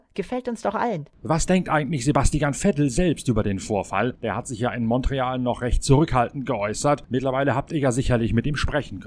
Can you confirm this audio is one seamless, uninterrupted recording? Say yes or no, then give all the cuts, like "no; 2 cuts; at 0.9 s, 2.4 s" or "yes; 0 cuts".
yes; 0 cuts